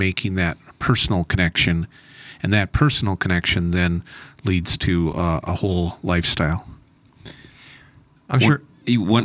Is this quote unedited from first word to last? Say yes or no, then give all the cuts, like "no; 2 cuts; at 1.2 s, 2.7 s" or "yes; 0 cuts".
yes; 0 cuts